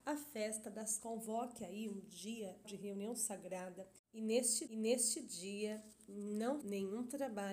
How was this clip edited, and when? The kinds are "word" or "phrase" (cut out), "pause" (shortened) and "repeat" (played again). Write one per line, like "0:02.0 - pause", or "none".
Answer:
0:01.0 - word
0:02.6 - word
0:04.0 - pause
0:04.7 - repeat
0:06.6 - word